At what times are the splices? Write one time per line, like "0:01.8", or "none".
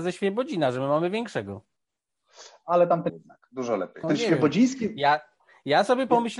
0:03.1
0:04.0